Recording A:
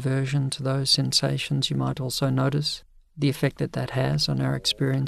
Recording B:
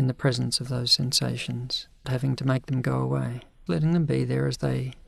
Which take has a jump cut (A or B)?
B